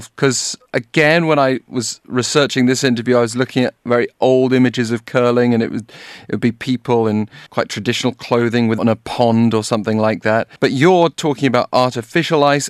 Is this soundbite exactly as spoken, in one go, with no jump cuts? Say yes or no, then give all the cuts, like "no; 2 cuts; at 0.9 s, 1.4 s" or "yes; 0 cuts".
no; 3 cuts; at 7.5 s, 8.8 s, 10.6 s